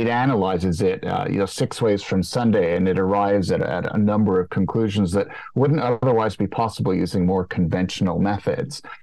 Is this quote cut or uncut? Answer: uncut